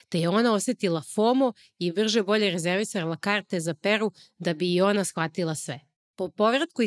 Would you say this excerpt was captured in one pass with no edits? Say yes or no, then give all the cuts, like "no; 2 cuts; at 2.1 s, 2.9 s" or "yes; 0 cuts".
yes; 0 cuts